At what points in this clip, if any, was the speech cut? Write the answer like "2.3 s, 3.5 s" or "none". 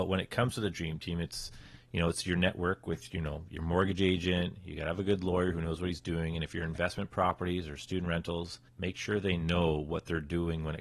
8.7 s

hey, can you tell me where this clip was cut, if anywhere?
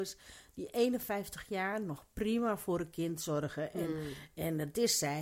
none

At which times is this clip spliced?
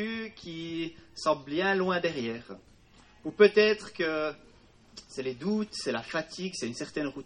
none

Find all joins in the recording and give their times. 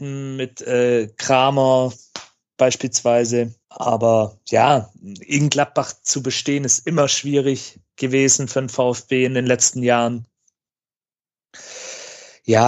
3.6 s

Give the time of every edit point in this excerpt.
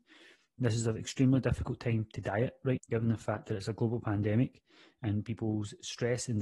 2.8 s

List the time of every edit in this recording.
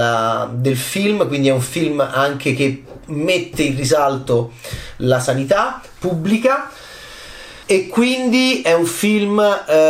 7.6 s

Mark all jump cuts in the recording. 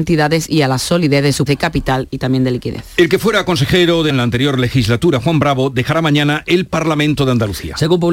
1.5 s, 4.1 s

